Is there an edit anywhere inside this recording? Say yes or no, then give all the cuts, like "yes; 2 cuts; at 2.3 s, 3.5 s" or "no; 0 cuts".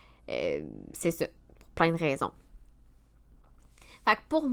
no; 0 cuts